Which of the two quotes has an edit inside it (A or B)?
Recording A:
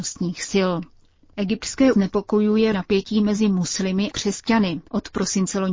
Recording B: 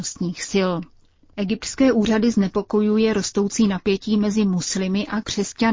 A